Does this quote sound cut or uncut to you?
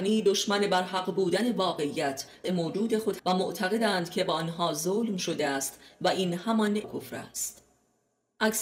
cut